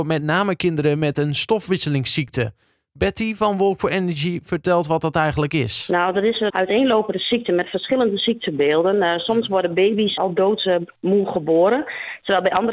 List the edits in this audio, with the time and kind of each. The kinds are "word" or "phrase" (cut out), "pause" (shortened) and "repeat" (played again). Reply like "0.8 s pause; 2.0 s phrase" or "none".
6.5 s word; 10.2 s word